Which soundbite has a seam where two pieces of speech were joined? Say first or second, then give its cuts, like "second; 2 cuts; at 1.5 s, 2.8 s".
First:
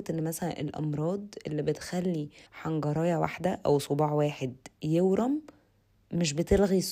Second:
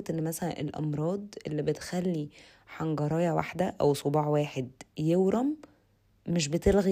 first; 1 cut; at 2.5 s